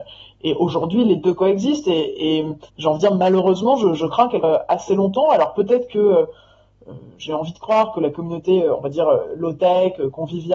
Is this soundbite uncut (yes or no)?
no